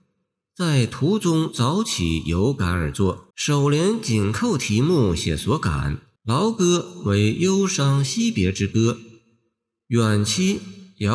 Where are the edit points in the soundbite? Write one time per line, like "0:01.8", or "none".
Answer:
0:03.3
0:06.2